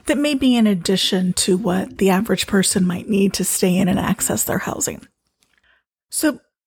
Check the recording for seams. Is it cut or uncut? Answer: uncut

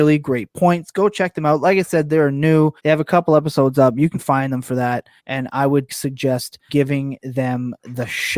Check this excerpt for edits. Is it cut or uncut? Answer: cut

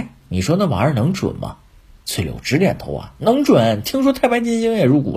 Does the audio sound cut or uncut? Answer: uncut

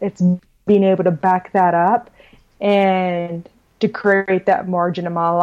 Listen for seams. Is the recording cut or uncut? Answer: uncut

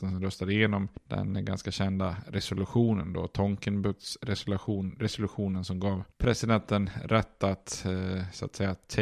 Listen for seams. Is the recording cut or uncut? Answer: cut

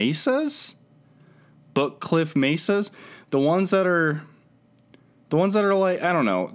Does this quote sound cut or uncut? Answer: uncut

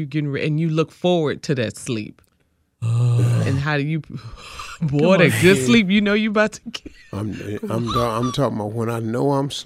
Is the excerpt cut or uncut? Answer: uncut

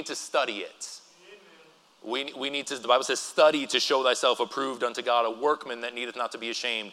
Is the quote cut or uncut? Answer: uncut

